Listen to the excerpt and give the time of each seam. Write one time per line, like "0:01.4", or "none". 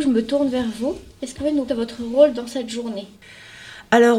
0:01.4
0:01.7